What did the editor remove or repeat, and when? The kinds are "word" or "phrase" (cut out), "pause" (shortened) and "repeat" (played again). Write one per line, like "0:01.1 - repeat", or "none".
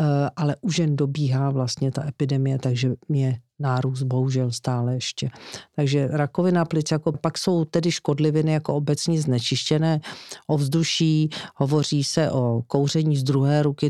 0:07.1 - word